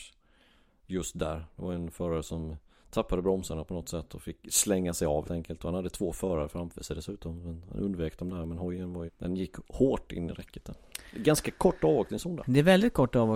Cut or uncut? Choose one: cut